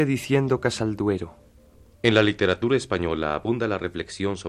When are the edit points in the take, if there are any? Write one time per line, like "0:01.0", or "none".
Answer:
none